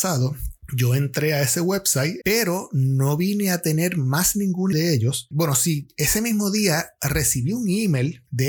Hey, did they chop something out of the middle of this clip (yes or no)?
yes